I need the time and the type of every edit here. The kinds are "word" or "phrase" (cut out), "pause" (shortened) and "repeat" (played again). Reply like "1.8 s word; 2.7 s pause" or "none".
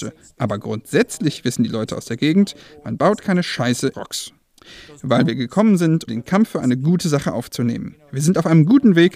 3.9 s phrase; 6.1 s word